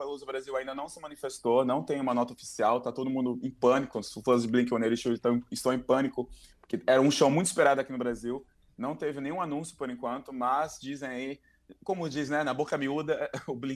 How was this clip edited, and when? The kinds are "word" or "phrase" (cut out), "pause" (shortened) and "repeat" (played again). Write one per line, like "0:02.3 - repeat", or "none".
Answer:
none